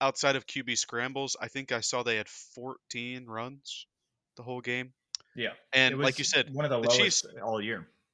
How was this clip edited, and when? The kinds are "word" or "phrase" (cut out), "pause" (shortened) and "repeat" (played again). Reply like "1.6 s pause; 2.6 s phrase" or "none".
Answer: none